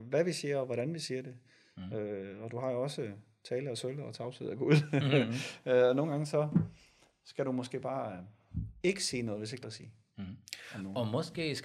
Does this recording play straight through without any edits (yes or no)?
no